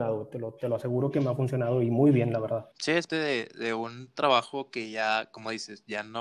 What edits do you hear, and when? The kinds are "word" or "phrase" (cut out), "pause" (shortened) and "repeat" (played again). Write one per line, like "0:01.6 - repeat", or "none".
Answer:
0:02.7 - pause
0:03.1 - word